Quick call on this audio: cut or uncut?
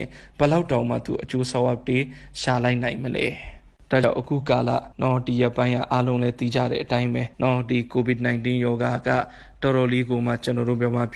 cut